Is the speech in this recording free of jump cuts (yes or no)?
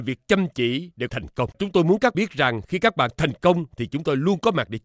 no